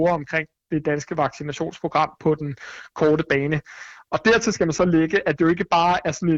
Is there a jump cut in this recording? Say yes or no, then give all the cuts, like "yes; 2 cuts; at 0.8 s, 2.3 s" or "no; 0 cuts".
no; 0 cuts